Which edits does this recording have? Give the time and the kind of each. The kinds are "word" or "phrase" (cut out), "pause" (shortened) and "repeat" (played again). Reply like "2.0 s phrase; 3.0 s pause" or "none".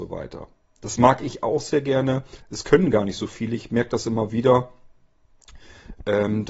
2.4 s pause